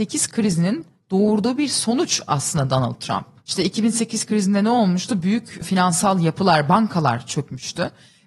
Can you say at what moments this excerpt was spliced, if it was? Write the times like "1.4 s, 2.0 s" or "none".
none